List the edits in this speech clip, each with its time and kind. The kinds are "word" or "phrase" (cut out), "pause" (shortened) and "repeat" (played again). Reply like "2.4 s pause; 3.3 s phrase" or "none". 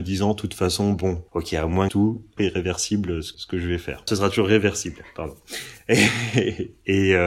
1.3 s pause; 1.9 s phrase; 2.4 s phrase; 3.3 s word